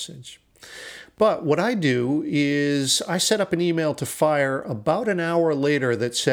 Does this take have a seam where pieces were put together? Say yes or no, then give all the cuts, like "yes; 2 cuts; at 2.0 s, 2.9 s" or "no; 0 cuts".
no; 0 cuts